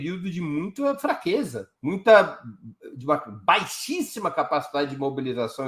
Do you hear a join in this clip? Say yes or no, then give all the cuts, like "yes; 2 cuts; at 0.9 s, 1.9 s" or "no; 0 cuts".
yes; 1 cut; at 1.8 s